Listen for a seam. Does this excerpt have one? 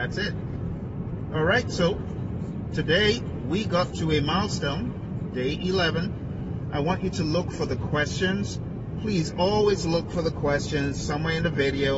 no; 0 cuts

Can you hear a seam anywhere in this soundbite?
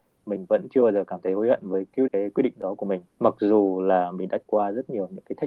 yes; 3 cuts; at 2.1 s, 3.1 s, 4.4 s

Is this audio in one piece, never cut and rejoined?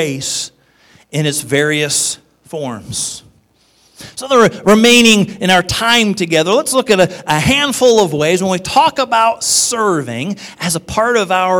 yes; 0 cuts

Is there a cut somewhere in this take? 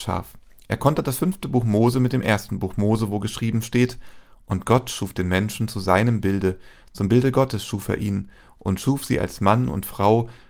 no; 0 cuts

